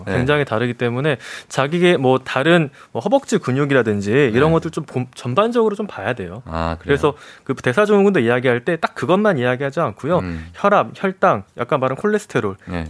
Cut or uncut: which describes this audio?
uncut